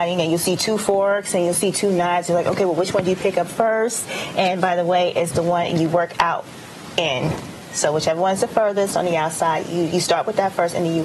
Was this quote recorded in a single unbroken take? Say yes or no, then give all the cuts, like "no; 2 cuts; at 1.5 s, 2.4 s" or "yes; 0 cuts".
yes; 0 cuts